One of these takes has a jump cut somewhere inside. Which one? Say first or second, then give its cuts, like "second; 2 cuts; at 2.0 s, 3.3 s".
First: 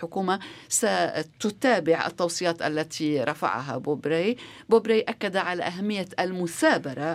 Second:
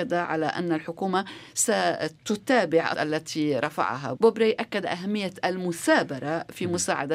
second; 3 cuts; at 2.9 s, 4.2 s, 4.8 s